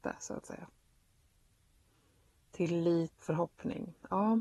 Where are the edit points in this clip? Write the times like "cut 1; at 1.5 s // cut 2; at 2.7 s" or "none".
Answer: cut 1; at 3.2 s